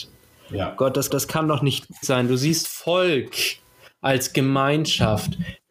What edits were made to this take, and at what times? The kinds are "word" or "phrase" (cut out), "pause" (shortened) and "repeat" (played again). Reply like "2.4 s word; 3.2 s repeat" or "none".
1.1 s repeat; 2.0 s word; 2.6 s phrase